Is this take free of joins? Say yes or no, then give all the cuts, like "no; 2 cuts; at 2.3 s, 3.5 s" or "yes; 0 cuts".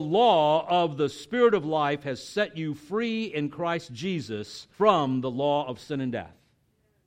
no; 1 cut; at 4.7 s